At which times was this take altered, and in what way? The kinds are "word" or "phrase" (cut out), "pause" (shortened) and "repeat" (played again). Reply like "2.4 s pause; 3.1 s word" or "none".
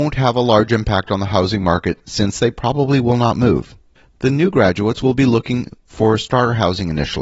none

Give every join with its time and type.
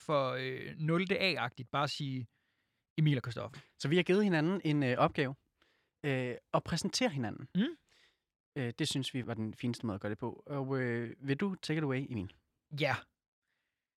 9.2 s word

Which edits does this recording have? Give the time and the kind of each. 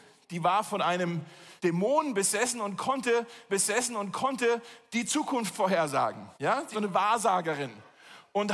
1.6 s pause; 3.5 s repeat; 6.3 s pause; 6.7 s phrase

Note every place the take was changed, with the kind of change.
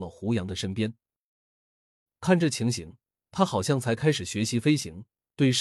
none

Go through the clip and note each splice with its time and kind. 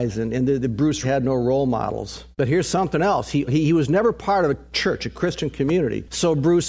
1.0 s word; 2.3 s pause; 3.5 s word

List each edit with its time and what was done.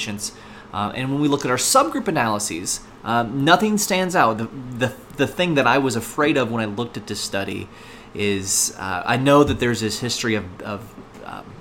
none

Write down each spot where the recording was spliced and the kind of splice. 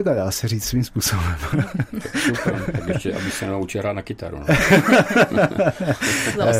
none

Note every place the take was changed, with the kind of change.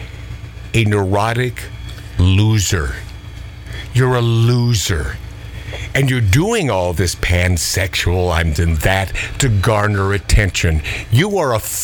7.0 s word; 8.6 s word

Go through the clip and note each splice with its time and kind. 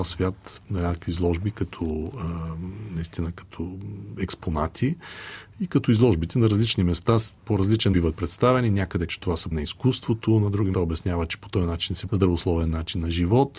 7.4 s pause; 7.9 s word; 9.1 s word; 9.5 s word; 10.7 s word; 12.1 s word

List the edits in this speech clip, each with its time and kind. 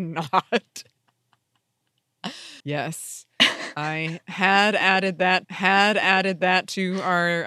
2.6 s pause; 5.4 s repeat

